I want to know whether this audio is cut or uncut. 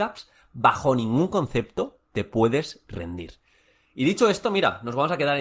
uncut